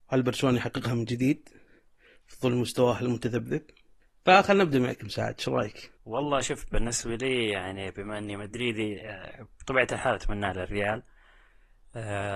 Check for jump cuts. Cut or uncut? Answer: cut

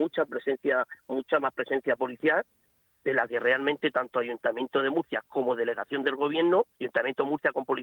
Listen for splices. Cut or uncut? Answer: cut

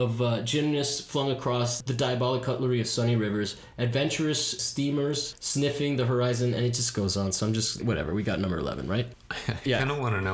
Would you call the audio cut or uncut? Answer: cut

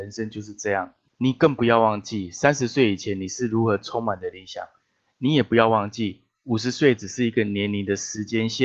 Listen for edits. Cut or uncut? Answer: uncut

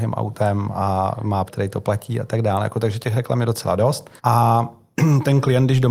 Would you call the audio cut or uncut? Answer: cut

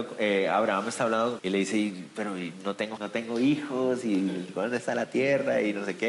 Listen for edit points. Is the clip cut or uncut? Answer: cut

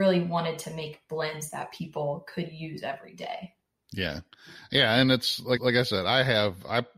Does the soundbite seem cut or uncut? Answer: cut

